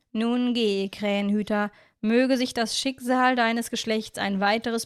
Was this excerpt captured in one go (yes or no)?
yes